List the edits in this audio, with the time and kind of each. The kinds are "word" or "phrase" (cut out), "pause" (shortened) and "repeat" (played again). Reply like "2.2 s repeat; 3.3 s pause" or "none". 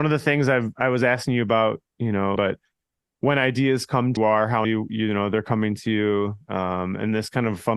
2.4 s phrase; 4.2 s phrase; 4.6 s word